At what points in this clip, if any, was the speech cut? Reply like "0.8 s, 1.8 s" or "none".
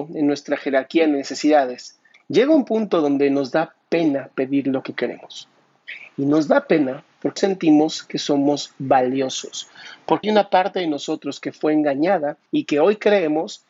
2.1 s, 7.4 s, 10.2 s, 12.5 s